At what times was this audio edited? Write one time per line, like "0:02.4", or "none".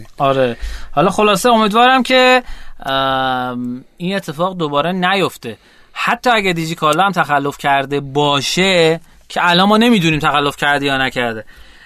none